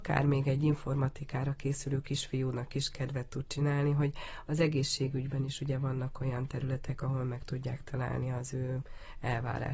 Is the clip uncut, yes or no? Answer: yes